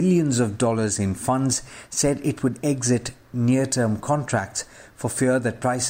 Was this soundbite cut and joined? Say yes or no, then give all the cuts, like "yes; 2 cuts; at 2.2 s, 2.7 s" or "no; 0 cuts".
no; 0 cuts